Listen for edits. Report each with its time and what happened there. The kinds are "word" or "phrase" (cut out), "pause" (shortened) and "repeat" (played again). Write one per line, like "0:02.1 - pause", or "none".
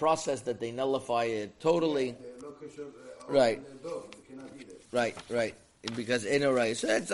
0:04.9 - pause